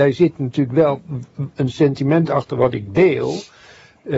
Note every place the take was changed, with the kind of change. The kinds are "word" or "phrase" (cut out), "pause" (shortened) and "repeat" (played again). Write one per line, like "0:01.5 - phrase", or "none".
0:01.5 - word